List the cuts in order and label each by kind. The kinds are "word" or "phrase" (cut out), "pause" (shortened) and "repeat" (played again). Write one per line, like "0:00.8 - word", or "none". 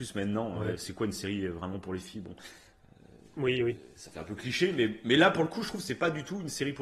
none